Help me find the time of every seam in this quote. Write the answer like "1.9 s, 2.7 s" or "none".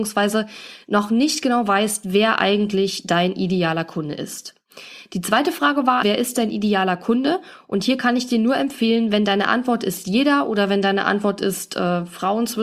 6.0 s